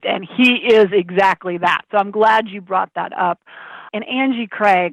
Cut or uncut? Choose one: uncut